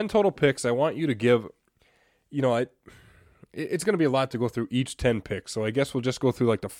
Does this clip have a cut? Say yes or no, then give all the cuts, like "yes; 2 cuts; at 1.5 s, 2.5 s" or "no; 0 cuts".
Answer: no; 0 cuts